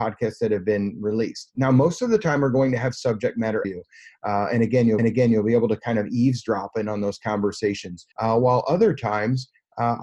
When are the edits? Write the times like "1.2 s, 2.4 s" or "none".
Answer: 3.6 s, 5.0 s, 8.1 s